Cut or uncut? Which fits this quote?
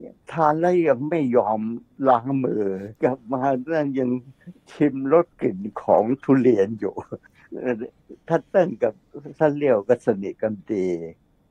cut